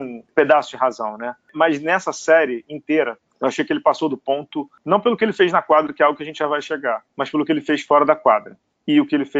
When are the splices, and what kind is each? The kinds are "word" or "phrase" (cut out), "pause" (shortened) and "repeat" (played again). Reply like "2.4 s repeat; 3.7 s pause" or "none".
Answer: none